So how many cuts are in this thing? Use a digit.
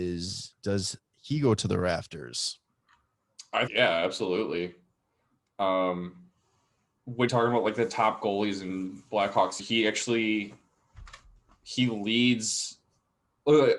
3